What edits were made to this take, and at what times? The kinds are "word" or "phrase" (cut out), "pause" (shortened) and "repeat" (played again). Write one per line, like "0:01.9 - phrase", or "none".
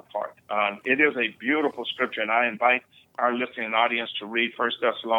none